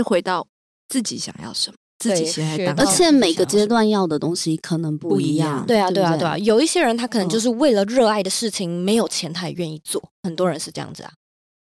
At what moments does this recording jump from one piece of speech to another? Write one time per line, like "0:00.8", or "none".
0:10.1